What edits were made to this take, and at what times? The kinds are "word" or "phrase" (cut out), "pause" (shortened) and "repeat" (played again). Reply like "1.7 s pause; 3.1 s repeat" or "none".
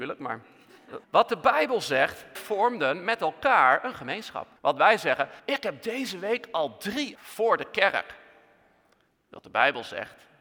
1.0 s pause; 2.4 s word; 4.6 s pause; 5.4 s pause; 7.2 s word